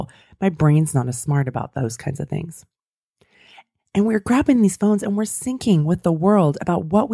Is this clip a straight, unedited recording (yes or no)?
yes